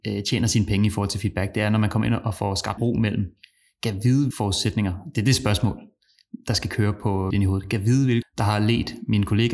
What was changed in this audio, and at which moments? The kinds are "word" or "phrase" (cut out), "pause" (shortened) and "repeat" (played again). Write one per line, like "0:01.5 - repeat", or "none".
0:02.8 - word
0:04.3 - word
0:07.3 - word
0:08.2 - word

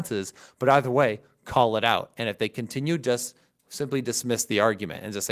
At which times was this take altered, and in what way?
none

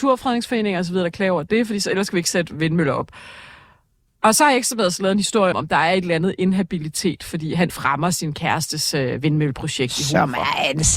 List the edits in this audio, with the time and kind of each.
0:05.5 - word
0:07.7 - word

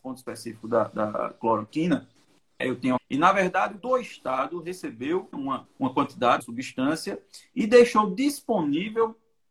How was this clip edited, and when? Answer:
0:02.6 - word
0:03.0 - word
0:03.8 - word
0:05.3 - word
0:05.6 - word
0:06.4 - word

